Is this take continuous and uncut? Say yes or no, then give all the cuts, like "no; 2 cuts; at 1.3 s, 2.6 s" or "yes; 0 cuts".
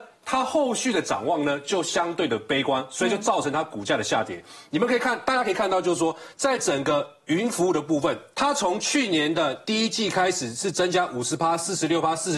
no; 1 cut; at 8.3 s